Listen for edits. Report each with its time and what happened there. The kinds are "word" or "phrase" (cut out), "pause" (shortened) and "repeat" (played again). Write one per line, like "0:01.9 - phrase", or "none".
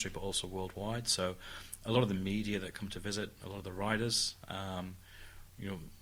none